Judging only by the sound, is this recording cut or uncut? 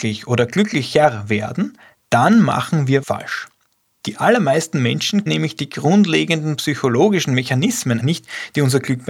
cut